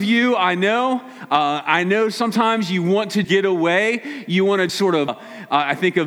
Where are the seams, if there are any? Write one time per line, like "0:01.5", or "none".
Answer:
0:03.2
0:04.7
0:05.1